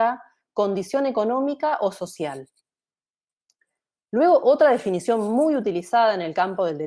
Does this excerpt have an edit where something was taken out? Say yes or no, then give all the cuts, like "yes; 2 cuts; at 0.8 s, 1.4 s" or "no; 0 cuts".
no; 0 cuts